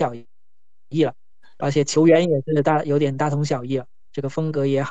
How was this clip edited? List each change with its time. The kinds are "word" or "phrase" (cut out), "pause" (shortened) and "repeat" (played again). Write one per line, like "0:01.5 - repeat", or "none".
0:01.6 - word